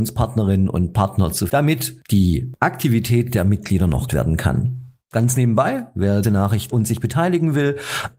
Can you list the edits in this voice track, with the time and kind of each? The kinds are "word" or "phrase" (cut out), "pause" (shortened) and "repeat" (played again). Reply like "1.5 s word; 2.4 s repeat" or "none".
1.5 s word; 4.1 s word; 6.2 s word; 6.7 s word